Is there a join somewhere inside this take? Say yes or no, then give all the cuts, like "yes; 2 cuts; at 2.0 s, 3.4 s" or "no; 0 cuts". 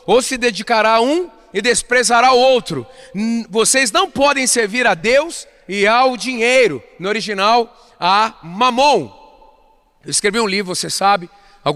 no; 0 cuts